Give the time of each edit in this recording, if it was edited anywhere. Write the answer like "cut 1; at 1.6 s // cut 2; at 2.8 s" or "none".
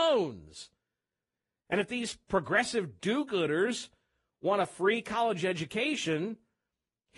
none